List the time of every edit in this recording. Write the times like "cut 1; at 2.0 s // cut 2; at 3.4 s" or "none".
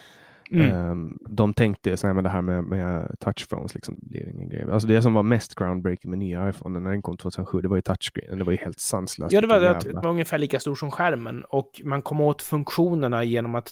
cut 1; at 2.0 s // cut 2; at 3.9 s // cut 3; at 10.0 s

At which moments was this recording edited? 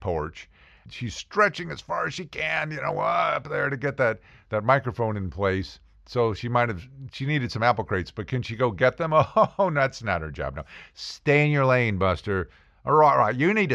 none

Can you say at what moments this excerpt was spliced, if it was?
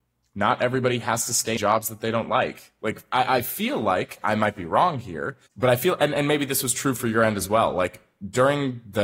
cut 1; at 1.6 s // cut 2; at 5.5 s

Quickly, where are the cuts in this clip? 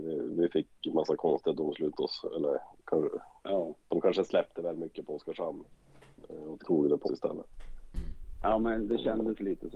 cut 1; at 1.9 s // cut 2; at 4.5 s // cut 3; at 6.6 s // cut 4; at 7.0 s

